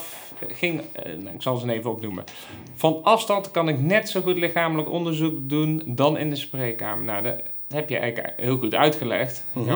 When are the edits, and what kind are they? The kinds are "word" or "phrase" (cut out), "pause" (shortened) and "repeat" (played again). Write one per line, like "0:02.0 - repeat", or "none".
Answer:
none

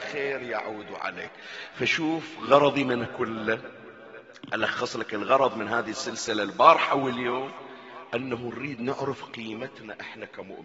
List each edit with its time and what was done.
0:03.1 - word

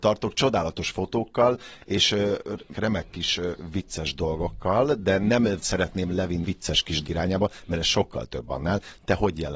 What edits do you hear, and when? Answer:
0:02.7 - word
0:06.4 - word
0:07.0 - word

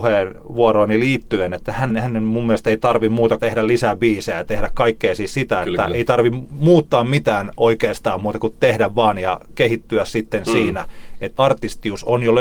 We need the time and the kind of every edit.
0:01.9 - word
0:03.4 - phrase
0:11.4 - word

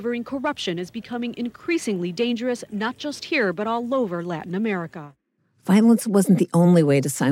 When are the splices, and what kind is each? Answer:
none

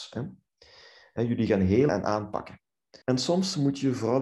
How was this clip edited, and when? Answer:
0:01.9 - phrase
0:03.0 - pause

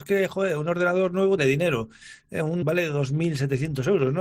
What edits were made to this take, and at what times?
0:01.4 - phrase
0:02.6 - phrase

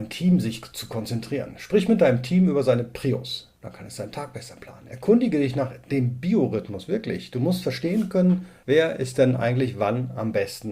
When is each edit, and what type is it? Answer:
0:03.6 - pause

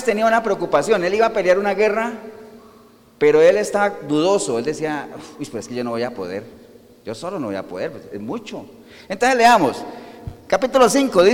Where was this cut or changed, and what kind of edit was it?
none

